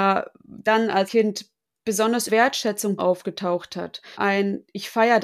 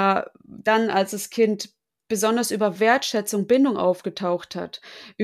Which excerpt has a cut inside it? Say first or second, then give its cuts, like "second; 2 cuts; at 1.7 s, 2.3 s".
first; 4 cuts; at 1.1 s, 2.3 s, 3.0 s, 4.1 s